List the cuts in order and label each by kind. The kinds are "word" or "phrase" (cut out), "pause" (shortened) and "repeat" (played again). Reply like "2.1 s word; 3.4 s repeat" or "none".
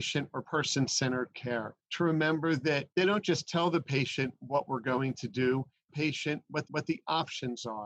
1.8 s pause; 2.9 s pause; 5.9 s phrase; 6.6 s repeat